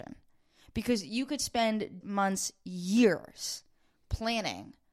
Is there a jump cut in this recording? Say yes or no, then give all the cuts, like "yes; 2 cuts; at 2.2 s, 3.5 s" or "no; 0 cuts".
yes; 1 cut; at 2.0 s